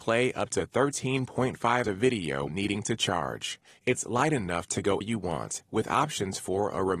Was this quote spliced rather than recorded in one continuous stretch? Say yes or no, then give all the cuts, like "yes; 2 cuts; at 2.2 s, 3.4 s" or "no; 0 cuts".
yes; 3 cuts; at 1.8 s, 2.5 s, 5.0 s